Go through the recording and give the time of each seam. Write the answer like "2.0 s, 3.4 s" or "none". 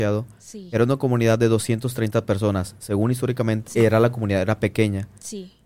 3.7 s